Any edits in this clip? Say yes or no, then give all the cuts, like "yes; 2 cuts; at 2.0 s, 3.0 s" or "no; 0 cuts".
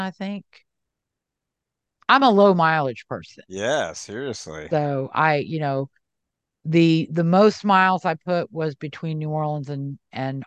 no; 0 cuts